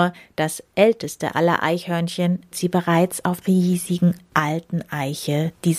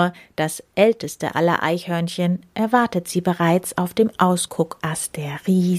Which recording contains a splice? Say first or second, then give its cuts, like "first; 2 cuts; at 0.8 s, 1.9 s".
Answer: first; 2 cuts; at 2.5 s, 3.4 s